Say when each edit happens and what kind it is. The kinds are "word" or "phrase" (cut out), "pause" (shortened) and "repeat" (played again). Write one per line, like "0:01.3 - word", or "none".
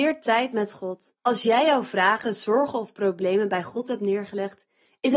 0:01.2 - pause